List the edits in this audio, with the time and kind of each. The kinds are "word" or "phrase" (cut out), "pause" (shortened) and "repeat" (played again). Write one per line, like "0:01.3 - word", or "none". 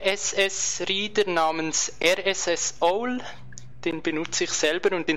none